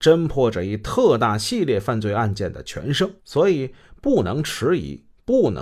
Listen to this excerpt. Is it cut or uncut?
cut